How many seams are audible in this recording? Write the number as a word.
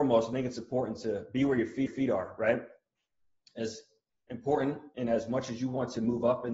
one